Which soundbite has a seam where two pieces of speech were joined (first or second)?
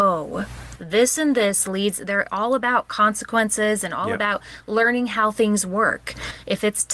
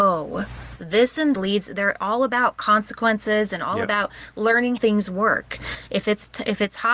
second